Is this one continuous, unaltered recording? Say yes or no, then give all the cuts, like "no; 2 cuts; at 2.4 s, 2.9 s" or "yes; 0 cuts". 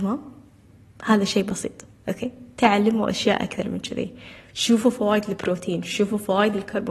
yes; 0 cuts